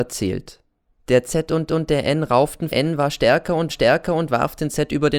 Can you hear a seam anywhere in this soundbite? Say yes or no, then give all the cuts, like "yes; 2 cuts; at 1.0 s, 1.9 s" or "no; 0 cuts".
yes; 4 cuts; at 0.9 s, 1.7 s, 2.7 s, 3.7 s